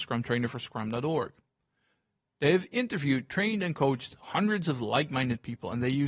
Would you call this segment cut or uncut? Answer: uncut